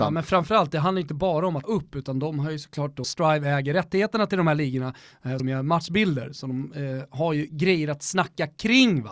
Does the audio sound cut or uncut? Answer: cut